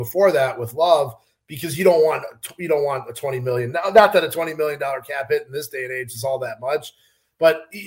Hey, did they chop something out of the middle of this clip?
no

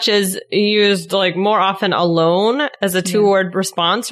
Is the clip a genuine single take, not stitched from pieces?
yes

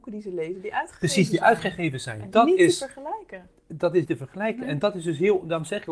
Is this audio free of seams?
no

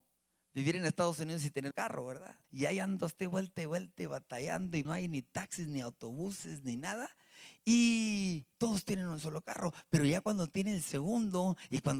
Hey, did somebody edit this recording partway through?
yes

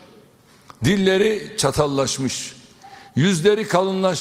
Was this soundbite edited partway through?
no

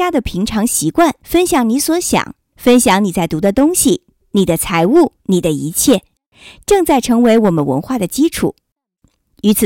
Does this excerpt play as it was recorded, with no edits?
no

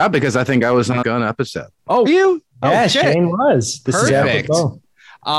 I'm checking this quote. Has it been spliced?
yes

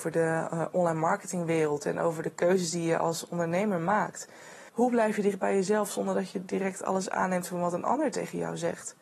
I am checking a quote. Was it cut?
yes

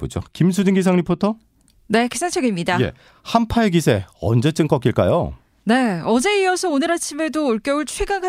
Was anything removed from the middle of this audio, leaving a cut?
no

